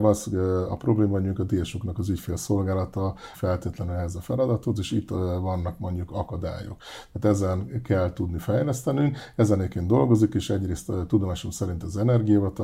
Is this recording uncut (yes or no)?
no